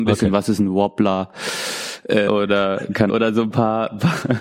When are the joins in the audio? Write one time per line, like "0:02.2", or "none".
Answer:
0:02.3
0:03.1